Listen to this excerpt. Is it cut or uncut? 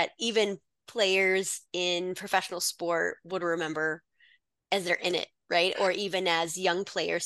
uncut